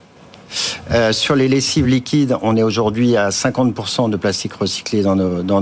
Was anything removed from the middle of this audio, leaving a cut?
no; 0 cuts

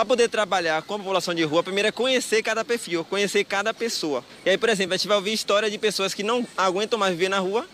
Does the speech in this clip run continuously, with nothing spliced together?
yes; 0 cuts

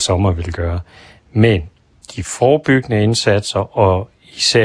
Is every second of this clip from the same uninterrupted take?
yes; 0 cuts

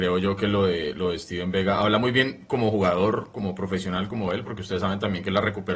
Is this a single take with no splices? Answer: yes; 0 cuts

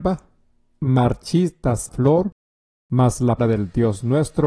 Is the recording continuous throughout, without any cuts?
no; 2 cuts; at 1.9 s, 3.4 s

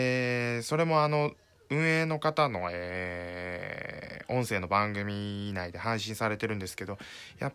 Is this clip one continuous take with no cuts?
yes; 0 cuts

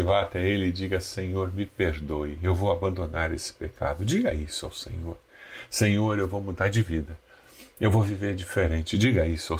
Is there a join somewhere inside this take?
no; 0 cuts

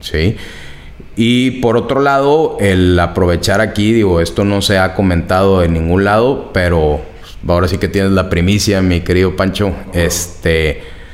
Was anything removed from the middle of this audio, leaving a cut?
no; 0 cuts

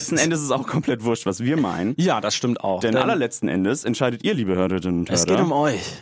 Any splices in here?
no; 0 cuts

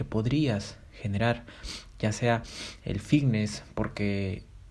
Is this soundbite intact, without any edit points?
yes; 0 cuts

